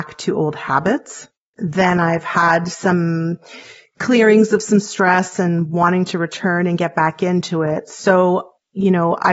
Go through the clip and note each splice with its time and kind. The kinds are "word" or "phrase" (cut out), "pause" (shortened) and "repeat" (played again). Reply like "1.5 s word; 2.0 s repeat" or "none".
1.4 s pause